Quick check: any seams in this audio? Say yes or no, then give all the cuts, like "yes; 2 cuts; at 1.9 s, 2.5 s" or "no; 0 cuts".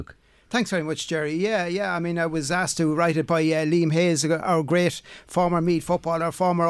no; 0 cuts